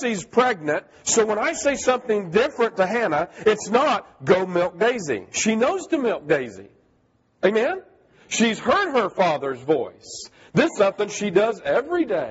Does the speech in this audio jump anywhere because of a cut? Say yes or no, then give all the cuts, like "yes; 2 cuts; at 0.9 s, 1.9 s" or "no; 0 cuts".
yes; 1 cut; at 10.8 s